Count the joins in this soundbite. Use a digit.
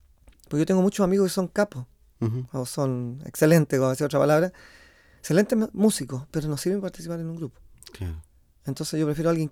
0